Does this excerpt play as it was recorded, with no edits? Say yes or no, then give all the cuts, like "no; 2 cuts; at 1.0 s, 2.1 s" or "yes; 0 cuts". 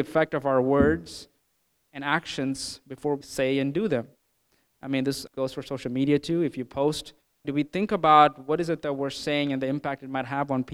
no; 3 cuts; at 3.2 s, 5.3 s, 7.4 s